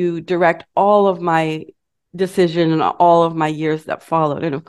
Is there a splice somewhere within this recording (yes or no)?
no